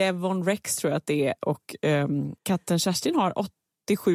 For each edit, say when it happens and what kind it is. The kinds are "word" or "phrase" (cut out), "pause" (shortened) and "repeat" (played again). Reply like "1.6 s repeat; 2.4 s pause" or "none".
2.4 s pause